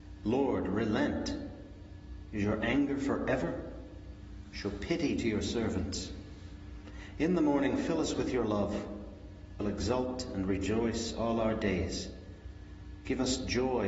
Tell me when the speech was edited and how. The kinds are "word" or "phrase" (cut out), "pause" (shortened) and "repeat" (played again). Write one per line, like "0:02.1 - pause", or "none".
0:09.6 - word

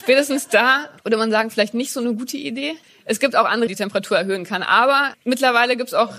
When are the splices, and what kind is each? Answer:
0:01.0 - pause
0:02.8 - pause
0:03.7 - phrase
0:05.1 - word

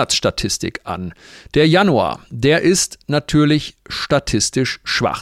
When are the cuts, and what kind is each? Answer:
none

